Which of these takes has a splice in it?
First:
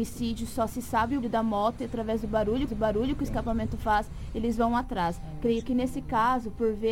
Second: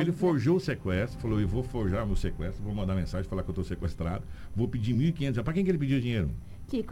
first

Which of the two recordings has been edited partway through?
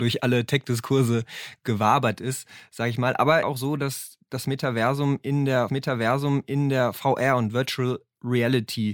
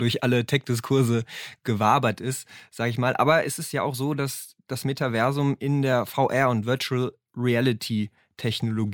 first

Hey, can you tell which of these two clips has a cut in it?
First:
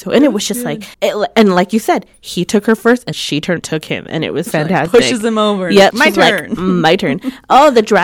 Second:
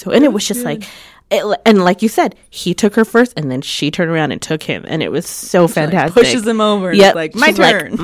first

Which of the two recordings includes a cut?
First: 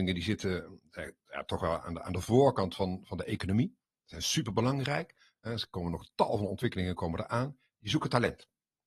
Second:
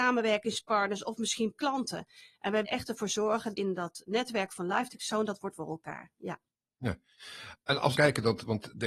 second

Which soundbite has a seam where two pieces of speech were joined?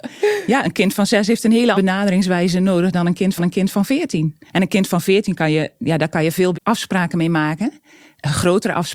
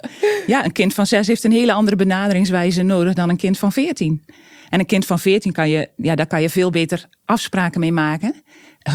first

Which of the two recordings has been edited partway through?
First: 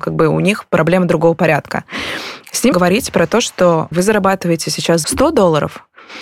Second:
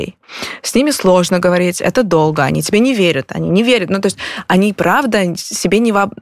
first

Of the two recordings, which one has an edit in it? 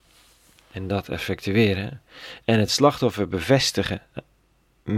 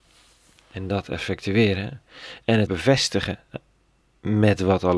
second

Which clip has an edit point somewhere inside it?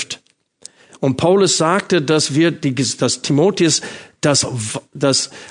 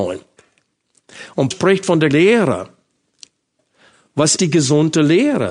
second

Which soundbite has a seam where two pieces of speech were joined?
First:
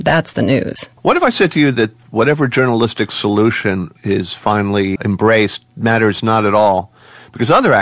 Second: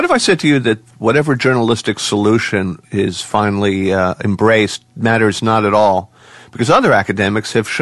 first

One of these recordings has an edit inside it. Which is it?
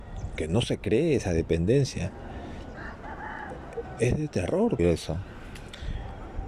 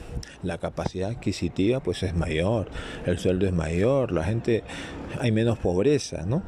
first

